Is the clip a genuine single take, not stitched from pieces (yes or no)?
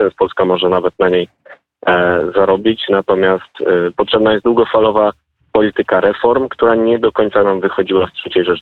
yes